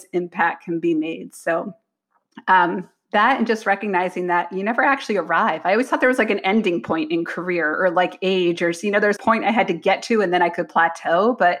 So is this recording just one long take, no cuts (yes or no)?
no